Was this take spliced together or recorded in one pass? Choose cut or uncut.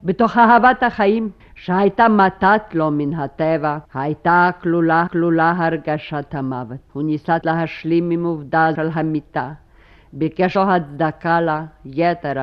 cut